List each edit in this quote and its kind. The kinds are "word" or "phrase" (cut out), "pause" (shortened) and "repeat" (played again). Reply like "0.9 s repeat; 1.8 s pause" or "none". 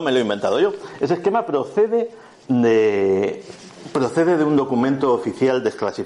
none